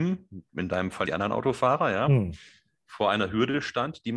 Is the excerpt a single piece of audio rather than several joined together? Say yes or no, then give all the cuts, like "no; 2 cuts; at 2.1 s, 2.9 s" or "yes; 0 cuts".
no; 1 cut; at 1.1 s